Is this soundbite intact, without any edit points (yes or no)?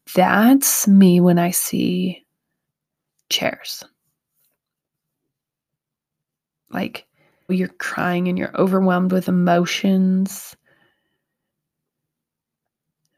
no